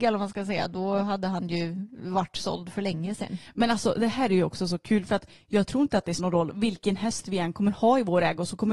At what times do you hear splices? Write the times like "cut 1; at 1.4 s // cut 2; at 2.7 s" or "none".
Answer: cut 1; at 6.2 s